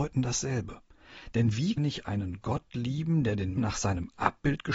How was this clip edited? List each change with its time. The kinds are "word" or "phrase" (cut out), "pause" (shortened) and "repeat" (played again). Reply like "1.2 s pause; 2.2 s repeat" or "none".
1.8 s word; 3.6 s word